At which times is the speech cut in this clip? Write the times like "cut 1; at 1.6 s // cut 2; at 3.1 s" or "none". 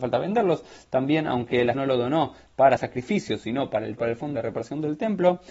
cut 1; at 1.7 s // cut 2; at 2.8 s // cut 3; at 4.0 s // cut 4; at 4.4 s